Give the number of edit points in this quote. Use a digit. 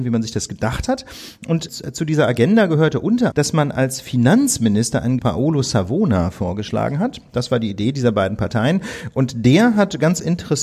3